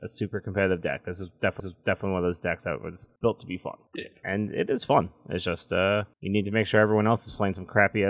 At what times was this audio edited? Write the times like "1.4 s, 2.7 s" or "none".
1.6 s, 3.2 s, 3.9 s, 6.1 s

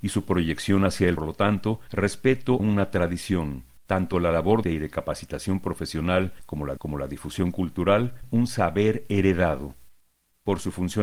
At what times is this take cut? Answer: 1.2 s, 2.6 s, 3.8 s, 4.6 s, 6.8 s, 8.2 s

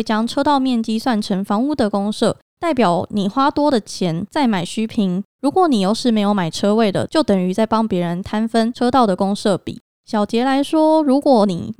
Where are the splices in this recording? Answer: none

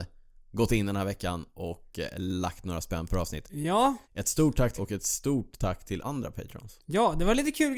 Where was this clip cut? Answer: 4.0 s, 4.8 s, 6.0 s

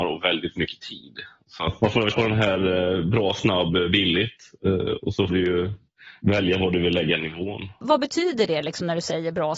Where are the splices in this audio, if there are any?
1.8 s, 2.1 s, 5.3 s

